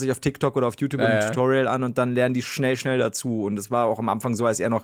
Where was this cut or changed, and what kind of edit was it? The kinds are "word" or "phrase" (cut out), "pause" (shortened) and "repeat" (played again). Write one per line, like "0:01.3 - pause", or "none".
none